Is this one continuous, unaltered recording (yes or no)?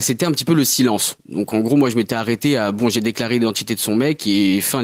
yes